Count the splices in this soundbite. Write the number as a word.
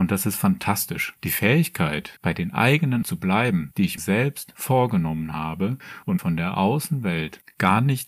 three